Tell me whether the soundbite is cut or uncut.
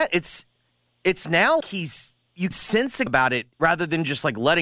cut